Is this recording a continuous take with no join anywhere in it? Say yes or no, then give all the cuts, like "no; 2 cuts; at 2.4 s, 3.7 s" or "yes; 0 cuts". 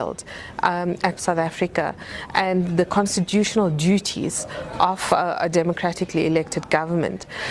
no; 1 cut; at 1.2 s